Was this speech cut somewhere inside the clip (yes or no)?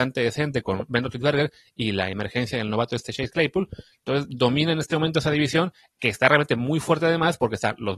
no